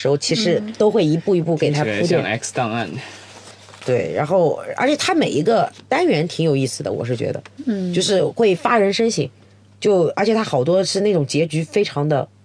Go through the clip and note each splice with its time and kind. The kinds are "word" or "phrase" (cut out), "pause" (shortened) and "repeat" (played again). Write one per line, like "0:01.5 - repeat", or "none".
none